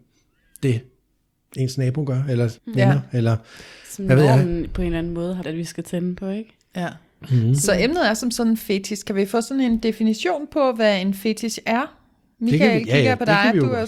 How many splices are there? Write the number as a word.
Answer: two